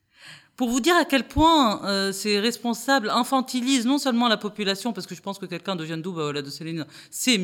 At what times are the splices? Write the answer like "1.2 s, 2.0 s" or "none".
none

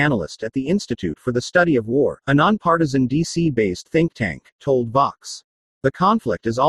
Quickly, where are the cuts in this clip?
5.6 s

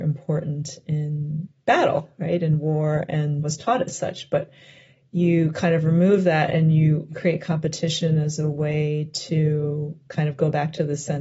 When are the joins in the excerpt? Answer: none

